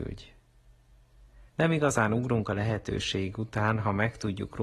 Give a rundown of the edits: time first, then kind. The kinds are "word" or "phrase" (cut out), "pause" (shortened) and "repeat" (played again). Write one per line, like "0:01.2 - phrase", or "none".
0:01.5 - pause